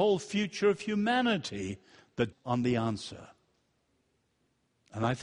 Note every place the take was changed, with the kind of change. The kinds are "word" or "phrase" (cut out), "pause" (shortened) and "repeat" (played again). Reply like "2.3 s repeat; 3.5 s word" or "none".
2.3 s word